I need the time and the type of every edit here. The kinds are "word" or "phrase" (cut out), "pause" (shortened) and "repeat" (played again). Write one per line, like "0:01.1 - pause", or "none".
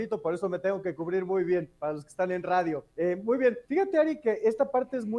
0:02.9 - pause
0:03.6 - pause